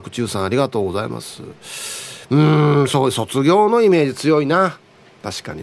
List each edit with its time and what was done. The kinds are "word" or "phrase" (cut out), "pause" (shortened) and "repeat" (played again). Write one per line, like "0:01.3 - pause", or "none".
none